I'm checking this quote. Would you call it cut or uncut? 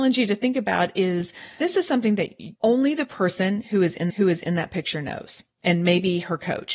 cut